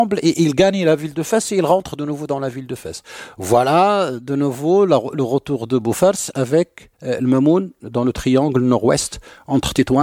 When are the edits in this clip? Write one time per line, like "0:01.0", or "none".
0:06.9